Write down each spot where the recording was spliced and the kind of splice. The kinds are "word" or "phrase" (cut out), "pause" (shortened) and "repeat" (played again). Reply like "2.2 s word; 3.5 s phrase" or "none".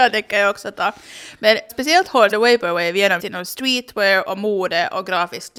1.7 s word; 2.3 s phrase; 3.2 s word